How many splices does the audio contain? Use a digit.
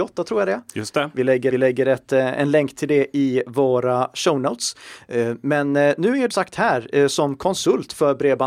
2